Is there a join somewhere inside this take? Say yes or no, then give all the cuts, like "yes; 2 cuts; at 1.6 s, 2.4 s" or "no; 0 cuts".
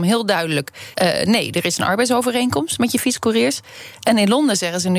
yes; 1 cut; at 0.9 s